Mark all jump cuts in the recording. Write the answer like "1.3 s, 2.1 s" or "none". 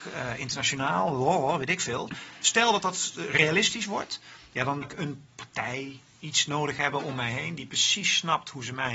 4.8 s, 6.1 s